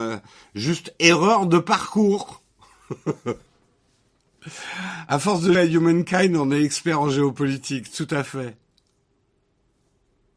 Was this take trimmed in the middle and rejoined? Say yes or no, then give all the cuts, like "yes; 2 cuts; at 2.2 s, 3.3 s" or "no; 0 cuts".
yes; 2 cuts; at 3.5 s, 5.5 s